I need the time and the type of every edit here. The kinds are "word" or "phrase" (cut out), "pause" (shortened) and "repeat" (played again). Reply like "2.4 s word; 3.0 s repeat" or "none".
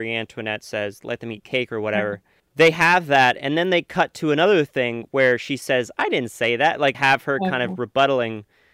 1.0 s word; 2.4 s pause; 6.9 s phrase